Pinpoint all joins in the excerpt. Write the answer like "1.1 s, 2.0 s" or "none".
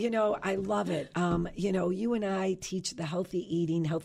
none